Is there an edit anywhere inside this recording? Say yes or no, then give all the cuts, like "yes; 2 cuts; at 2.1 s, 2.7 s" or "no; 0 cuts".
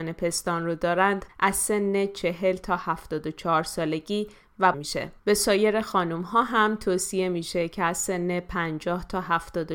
yes; 3 cuts; at 1.3 s, 4.7 s, 5.2 s